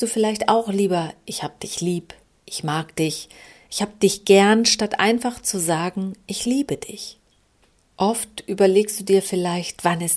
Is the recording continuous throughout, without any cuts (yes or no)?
yes